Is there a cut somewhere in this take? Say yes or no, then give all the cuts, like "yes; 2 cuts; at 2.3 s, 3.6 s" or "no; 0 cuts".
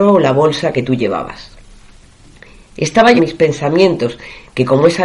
yes; 1 cut; at 3.2 s